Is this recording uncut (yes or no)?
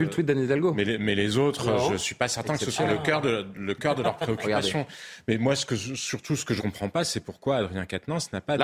no